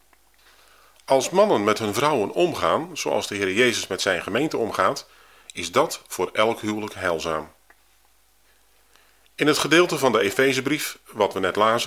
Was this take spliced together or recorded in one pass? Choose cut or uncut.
uncut